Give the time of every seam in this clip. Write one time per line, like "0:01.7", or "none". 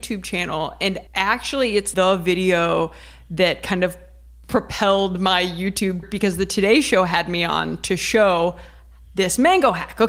0:01.1
0:01.9
0:06.0

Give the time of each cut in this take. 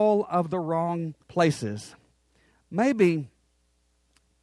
0:01.2

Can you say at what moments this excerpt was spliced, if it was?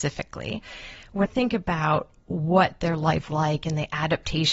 0:01.3
0:03.3

